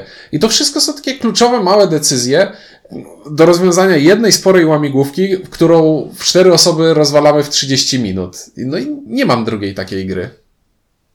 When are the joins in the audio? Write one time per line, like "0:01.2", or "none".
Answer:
none